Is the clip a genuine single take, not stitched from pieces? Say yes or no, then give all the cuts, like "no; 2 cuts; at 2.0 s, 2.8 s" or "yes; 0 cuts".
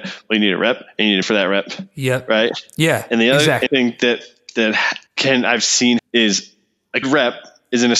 no; 5 cuts; at 1.2 s, 3.7 s, 5.1 s, 6.0 s, 7.0 s